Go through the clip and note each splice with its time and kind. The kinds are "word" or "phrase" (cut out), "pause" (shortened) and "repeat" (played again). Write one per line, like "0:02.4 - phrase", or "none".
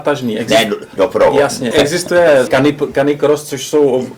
0:01.0 - word
0:01.7 - word
0:02.5 - word